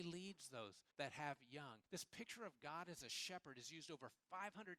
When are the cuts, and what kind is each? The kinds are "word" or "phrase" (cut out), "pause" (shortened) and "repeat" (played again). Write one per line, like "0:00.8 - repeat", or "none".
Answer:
0:00.9 - pause
0:01.8 - pause